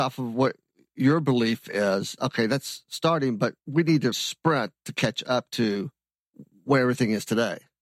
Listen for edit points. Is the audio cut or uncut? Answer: cut